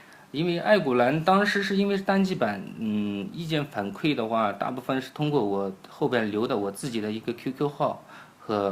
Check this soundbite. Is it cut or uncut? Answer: uncut